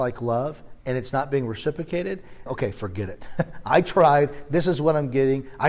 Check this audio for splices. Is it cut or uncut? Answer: cut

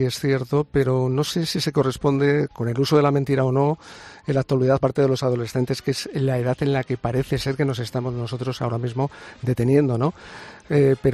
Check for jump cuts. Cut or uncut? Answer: cut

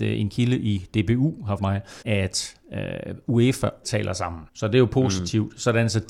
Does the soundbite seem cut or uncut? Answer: cut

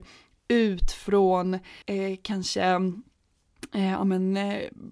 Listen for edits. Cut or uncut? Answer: cut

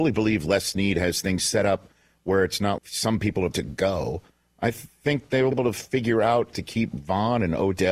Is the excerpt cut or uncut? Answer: cut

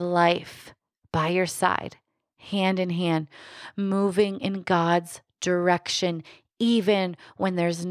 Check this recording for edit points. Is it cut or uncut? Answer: uncut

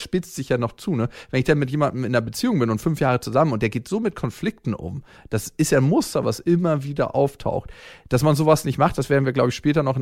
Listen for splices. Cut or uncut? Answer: uncut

